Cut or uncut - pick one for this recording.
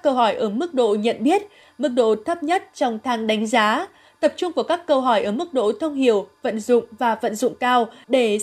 uncut